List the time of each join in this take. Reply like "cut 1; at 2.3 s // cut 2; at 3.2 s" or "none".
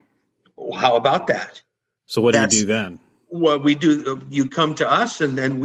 none

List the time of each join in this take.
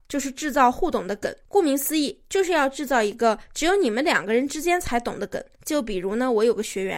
cut 1; at 1.4 s // cut 2; at 5.5 s

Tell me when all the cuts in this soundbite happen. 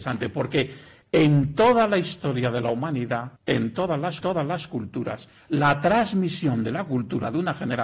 cut 1; at 3.4 s // cut 2; at 4.2 s

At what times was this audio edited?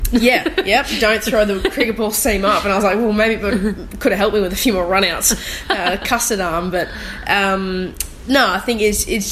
none

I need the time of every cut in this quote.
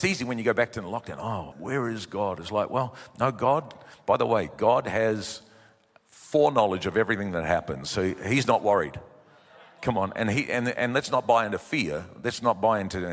cut 1; at 1.5 s

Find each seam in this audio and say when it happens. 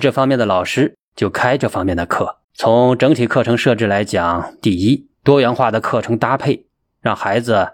cut 1; at 2.4 s // cut 2; at 5.1 s

